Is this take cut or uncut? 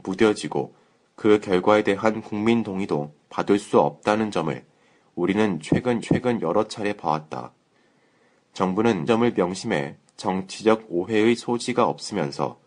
cut